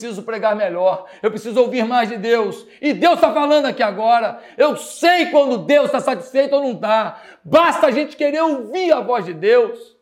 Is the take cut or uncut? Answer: uncut